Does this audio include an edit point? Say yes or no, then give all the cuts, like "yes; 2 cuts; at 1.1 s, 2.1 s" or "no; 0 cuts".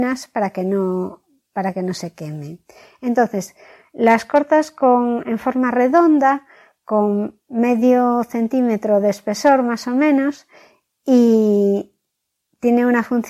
no; 0 cuts